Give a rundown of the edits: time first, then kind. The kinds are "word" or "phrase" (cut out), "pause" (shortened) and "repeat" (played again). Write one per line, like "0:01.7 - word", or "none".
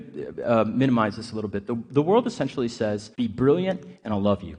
0:03.1 - pause